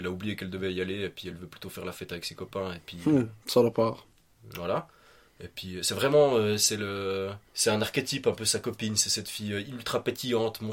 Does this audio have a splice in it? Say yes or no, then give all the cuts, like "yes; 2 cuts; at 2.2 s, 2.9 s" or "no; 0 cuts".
yes; 1 cut; at 7.5 s